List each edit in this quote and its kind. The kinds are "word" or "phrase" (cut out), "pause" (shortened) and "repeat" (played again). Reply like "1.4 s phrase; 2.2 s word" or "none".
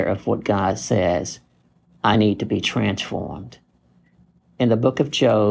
none